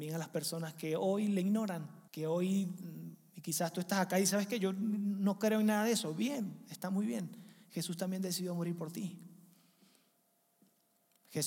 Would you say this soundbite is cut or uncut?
cut